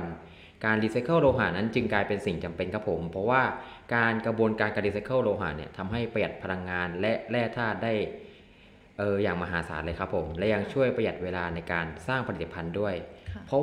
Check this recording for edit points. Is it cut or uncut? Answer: uncut